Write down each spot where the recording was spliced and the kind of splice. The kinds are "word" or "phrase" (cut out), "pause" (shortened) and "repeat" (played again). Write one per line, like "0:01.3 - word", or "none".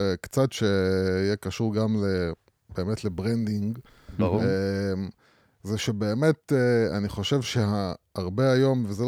none